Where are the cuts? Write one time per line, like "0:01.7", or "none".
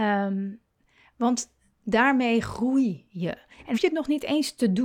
0:03.7